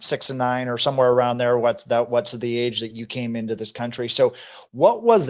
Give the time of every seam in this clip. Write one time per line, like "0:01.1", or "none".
none